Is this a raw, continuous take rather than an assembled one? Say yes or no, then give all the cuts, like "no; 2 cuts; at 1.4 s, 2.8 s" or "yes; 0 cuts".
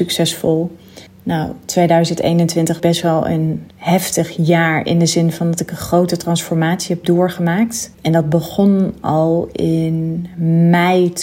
no; 4 cuts; at 1.1 s, 2.8 s, 3.7 s, 7.9 s